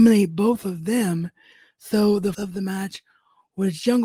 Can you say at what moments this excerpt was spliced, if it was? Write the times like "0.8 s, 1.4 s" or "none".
2.3 s